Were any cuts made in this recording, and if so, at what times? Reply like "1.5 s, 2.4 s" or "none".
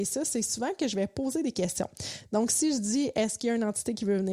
none